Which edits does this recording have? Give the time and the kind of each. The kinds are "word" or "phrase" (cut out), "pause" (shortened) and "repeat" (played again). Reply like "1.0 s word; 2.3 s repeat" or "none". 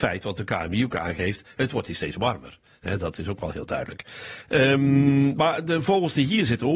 none